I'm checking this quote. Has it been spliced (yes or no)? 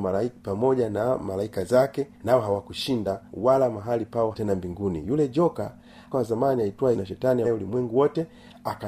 yes